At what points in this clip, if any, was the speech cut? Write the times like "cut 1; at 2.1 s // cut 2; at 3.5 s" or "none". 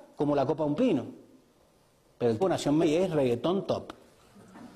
cut 1; at 2.4 s // cut 2; at 2.8 s